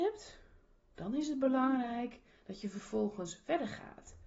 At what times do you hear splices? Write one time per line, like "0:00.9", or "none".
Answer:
none